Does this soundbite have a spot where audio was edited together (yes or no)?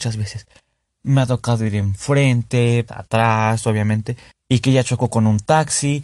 yes